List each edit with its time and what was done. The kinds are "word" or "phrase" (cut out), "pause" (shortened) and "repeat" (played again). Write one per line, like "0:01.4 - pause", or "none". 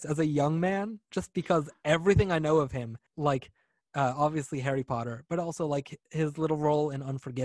0:03.1 - pause